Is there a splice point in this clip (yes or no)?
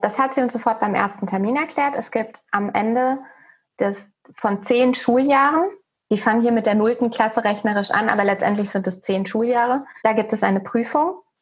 no